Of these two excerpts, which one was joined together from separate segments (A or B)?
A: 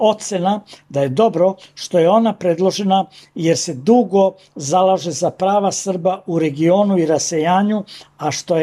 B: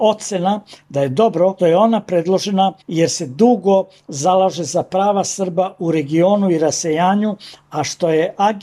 B